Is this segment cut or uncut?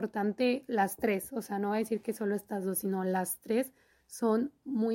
uncut